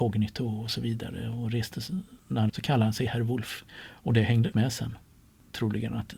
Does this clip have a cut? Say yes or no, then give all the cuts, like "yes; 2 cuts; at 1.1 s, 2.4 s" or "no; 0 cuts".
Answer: yes; 3 cuts; at 2.5 s, 3.7 s, 4.5 s